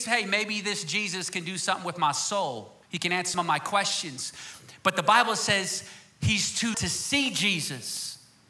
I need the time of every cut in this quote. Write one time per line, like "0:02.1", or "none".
0:02.8
0:03.3
0:06.7